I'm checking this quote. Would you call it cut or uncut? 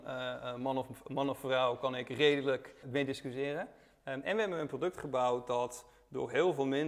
cut